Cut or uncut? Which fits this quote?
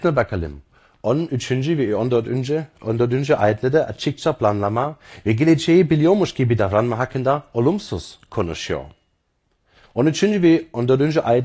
uncut